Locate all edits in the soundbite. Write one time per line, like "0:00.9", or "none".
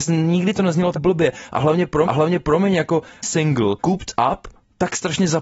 0:00.9
0:02.0
0:03.2
0:03.8